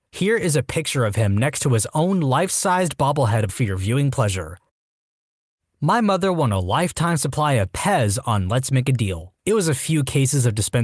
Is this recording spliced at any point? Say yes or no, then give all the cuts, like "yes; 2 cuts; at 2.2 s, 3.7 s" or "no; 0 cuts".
yes; 2 cuts; at 3.5 s, 9.4 s